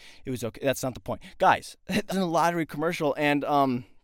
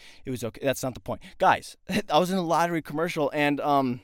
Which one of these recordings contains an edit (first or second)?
first